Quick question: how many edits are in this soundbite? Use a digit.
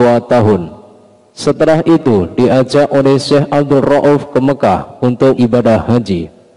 1